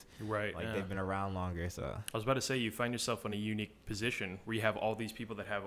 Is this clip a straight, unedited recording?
yes; 0 cuts

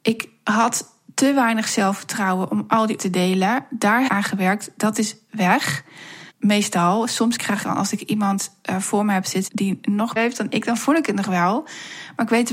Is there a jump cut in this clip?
yes; 6 cuts; at 3.0 s, 4.1 s, 6.3 s, 7.6 s, 9.5 s, 10.2 s

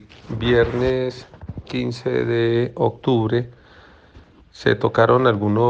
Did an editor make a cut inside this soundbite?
no; 0 cuts

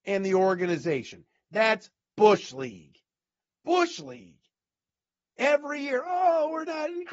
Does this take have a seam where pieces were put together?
no; 0 cuts

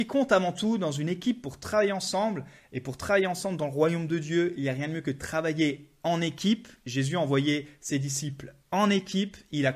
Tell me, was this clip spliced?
no; 0 cuts

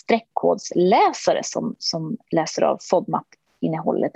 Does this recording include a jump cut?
no; 0 cuts

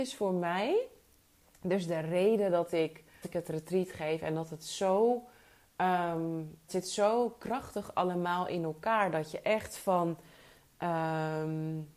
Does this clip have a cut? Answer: yes; 2 cuts; at 3.2 s, 6.7 s

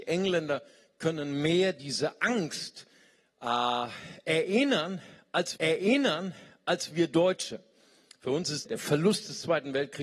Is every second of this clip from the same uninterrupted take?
no; 2 cuts; at 5.6 s, 8.7 s

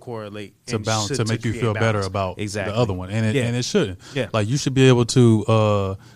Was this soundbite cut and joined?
no; 0 cuts

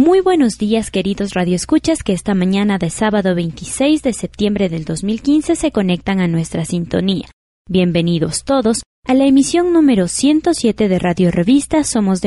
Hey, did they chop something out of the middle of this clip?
no; 0 cuts

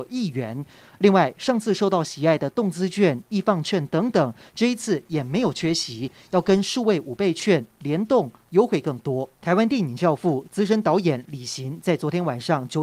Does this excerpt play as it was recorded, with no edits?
no; 1 cut; at 9.4 s

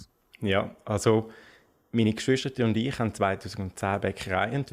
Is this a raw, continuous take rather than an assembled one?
yes; 0 cuts

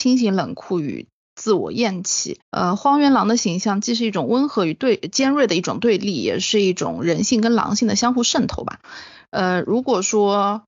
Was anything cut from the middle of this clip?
yes; 1 cut; at 2.4 s

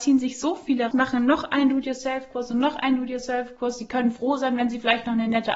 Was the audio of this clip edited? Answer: yes; 1 cut; at 0.9 s

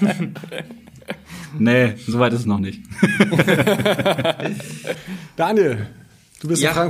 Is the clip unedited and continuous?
yes; 0 cuts

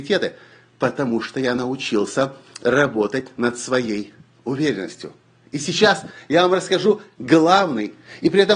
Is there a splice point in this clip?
no; 0 cuts

